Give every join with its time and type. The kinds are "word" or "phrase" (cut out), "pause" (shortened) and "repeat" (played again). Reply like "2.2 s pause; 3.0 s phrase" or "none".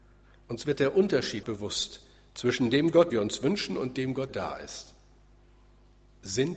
1.4 s word; 3.1 s word; 4.3 s word